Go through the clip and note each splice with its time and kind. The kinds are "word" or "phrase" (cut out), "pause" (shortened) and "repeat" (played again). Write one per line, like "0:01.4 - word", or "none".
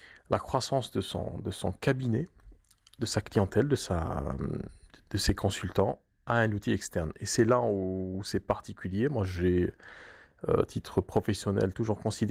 none